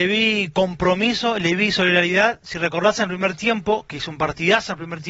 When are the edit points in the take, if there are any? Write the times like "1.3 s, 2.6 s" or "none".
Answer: none